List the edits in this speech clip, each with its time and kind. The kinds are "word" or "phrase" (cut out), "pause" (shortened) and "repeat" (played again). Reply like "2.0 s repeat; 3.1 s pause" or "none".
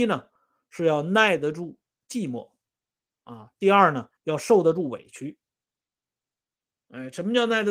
4.2 s pause

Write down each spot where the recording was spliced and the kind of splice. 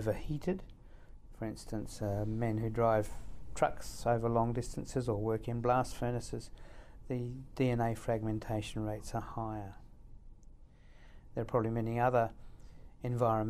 none

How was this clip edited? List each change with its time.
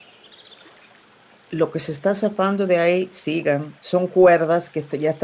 3.8 s pause

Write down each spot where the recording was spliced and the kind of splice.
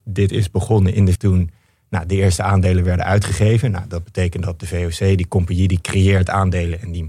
1.1 s word

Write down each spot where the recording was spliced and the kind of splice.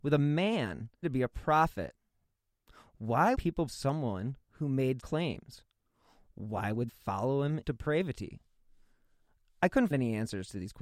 1.0 s word; 3.3 s word; 3.7 s word; 5.0 s word; 6.9 s word; 7.6 s word; 9.9 s word

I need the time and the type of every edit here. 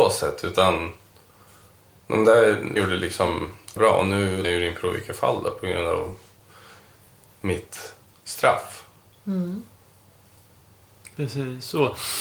2.8 s word; 3.8 s word; 4.4 s word; 8.1 s word

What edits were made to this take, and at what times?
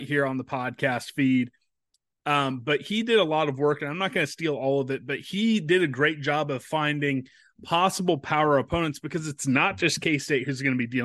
none

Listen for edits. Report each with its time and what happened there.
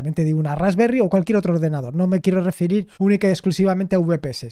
2.9 s pause

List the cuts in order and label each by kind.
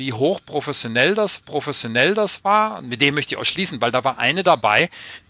1.4 s repeat

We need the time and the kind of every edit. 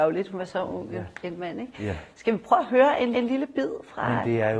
3.1 s repeat

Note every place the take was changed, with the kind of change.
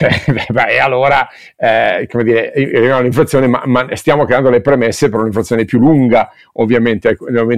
none

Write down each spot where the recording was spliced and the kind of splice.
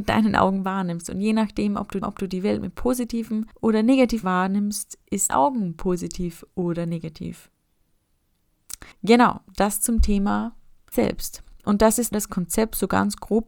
2.0 s repeat; 3.5 s pause; 4.2 s word; 5.3 s phrase; 8.9 s pause; 10.9 s word; 11.6 s pause; 12.1 s word

